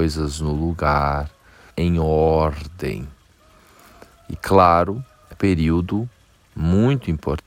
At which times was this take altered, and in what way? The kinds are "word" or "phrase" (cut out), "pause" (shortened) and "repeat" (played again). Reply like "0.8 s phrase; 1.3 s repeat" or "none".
1.7 s word; 5.3 s word